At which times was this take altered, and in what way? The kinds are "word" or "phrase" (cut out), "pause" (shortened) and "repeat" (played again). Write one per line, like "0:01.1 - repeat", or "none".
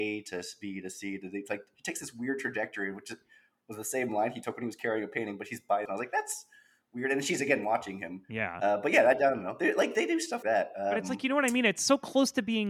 0:05.9 - word
0:10.4 - word